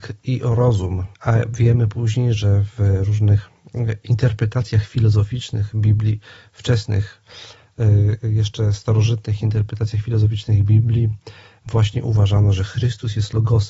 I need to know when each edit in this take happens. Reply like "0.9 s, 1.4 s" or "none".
1.1 s